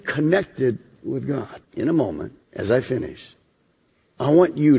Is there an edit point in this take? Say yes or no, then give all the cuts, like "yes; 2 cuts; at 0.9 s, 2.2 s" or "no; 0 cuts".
yes; 3 cuts; at 1.6 s, 2.4 s, 3.8 s